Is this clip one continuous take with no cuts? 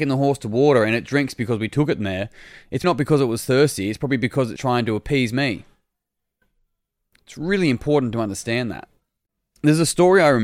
no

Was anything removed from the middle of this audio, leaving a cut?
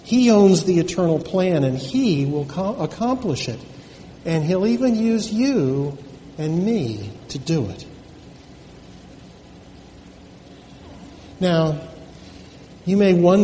no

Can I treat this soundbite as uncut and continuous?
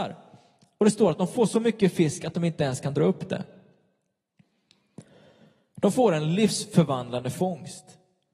yes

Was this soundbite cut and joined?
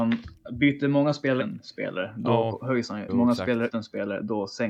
yes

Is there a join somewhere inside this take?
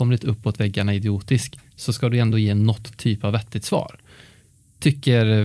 no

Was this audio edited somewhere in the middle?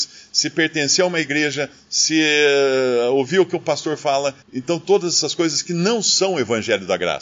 yes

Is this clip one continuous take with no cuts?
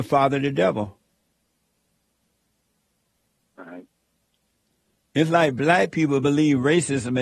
yes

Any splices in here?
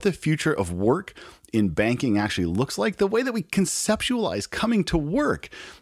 no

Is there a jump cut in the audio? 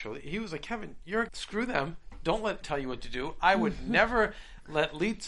yes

